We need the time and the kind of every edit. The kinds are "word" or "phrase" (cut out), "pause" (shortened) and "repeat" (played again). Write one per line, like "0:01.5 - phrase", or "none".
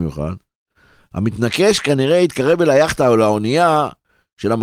none